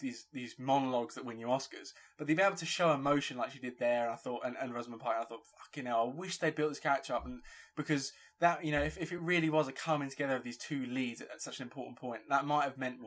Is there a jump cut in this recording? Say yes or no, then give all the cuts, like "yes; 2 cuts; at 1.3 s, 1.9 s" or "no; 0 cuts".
no; 0 cuts